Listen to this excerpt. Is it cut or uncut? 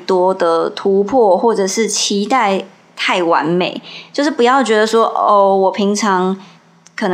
uncut